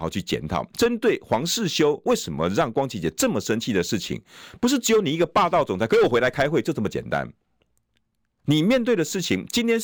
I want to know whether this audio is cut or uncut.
uncut